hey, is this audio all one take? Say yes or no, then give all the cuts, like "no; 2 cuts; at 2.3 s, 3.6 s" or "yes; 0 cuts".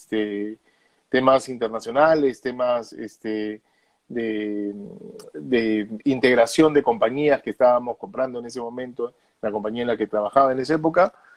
yes; 0 cuts